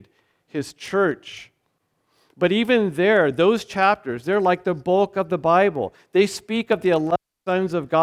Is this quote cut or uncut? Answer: uncut